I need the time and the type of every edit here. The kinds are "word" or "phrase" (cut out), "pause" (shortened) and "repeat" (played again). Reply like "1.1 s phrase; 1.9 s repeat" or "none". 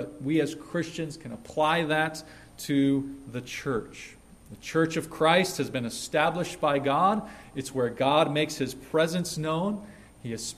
none

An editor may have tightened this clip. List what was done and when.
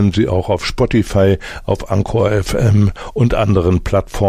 none

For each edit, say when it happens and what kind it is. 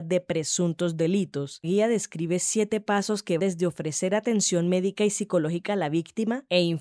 1.6 s word; 3.4 s word

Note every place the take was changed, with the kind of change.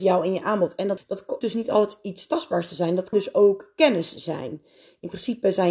1.0 s word; 1.4 s word; 3.1 s word

